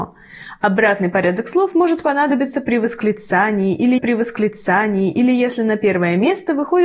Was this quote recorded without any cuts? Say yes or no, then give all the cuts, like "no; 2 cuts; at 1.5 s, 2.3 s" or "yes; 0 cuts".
no; 1 cut; at 4.0 s